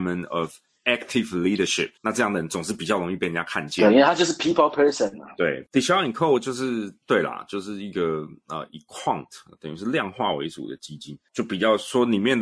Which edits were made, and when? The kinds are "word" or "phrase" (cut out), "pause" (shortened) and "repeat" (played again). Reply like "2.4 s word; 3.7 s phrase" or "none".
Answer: 2.0 s pause